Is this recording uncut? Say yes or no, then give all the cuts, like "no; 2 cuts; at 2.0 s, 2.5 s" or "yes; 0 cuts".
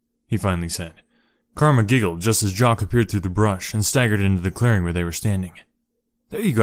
yes; 0 cuts